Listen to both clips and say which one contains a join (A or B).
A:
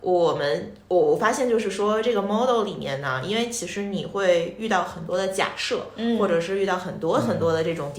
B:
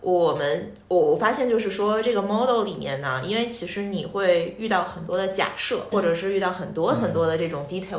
B